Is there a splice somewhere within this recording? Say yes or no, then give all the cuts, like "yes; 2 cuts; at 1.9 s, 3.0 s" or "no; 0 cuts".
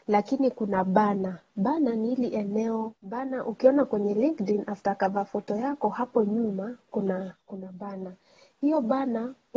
yes; 1 cut; at 3.0 s